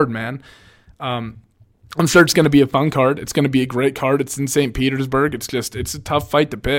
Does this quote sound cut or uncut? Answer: uncut